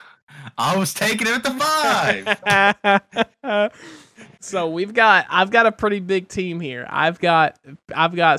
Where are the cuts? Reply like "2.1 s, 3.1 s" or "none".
none